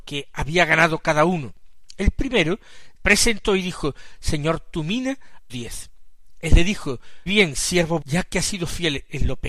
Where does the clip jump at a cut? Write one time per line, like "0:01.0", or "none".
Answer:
0:03.0
0:05.5
0:07.3
0:08.0